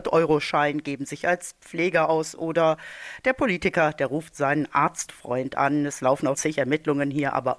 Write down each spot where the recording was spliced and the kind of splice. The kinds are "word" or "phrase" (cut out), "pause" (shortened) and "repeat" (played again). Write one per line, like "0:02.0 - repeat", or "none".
0:06.3 - word